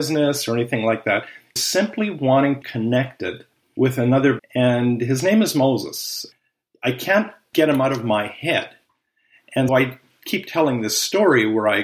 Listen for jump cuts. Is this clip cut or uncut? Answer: cut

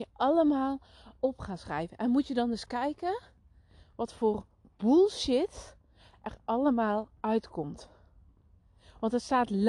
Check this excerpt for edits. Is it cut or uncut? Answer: uncut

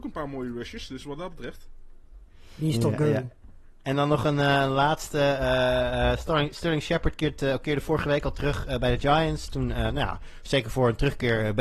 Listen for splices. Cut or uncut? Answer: uncut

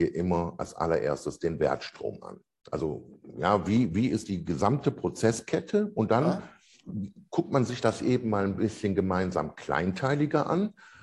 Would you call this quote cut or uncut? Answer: uncut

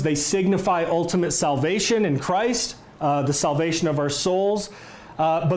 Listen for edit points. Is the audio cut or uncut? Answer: uncut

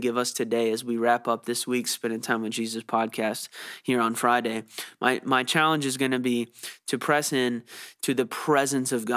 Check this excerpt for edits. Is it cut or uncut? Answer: uncut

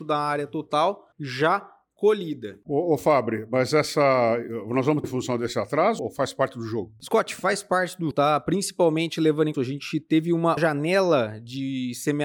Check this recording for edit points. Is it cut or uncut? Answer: cut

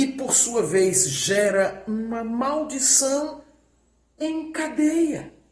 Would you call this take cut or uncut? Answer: uncut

